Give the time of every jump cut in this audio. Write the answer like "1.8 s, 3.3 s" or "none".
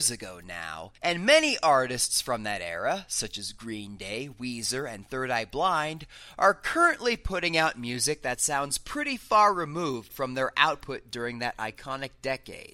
1.0 s